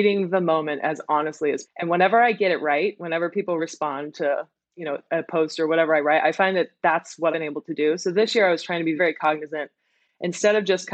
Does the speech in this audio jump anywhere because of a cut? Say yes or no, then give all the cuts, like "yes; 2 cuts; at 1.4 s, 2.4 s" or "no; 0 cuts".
yes; 4 cuts; at 1.6 s, 3.6 s, 7.3 s, 9.0 s